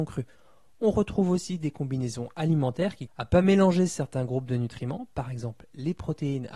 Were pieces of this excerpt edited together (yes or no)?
yes